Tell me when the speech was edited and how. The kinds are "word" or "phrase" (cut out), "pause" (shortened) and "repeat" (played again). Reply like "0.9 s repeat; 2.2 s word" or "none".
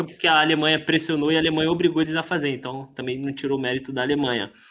none